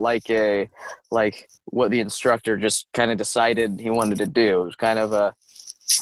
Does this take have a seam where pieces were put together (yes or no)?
yes